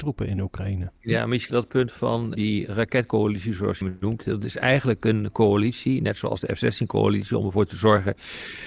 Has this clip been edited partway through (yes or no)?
yes